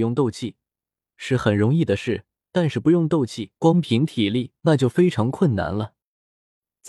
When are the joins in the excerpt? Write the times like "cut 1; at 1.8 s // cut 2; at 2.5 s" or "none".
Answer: cut 1; at 3.6 s // cut 2; at 4.6 s